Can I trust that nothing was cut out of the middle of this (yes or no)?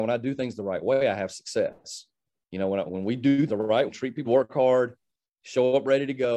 no